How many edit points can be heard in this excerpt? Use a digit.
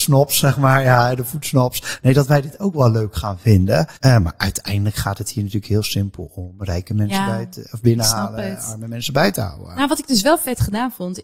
1